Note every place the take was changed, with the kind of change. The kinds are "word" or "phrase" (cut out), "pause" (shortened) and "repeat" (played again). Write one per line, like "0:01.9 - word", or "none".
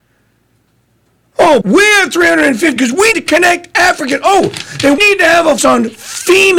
0:01.6 - word
0:02.8 - word
0:03.1 - word
0:05.0 - word
0:05.6 - word